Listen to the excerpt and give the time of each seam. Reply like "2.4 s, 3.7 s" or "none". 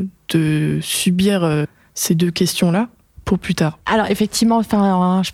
none